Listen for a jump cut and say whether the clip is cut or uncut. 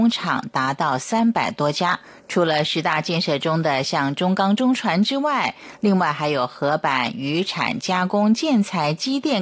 cut